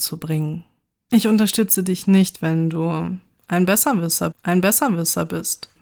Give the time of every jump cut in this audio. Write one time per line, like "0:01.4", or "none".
0:04.3